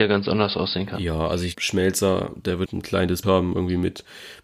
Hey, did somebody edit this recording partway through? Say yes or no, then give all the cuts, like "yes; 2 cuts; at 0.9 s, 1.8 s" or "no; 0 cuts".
yes; 3 cuts; at 1.5 s, 2.7 s, 3.2 s